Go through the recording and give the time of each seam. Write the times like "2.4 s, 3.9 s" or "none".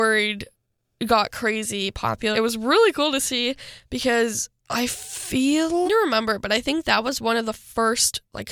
2.3 s, 4.6 s, 5.8 s